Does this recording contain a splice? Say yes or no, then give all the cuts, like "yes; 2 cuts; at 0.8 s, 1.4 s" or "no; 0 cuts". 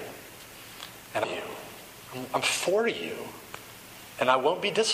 yes; 1 cut; at 1.2 s